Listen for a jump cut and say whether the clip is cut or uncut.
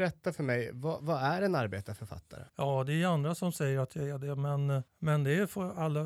cut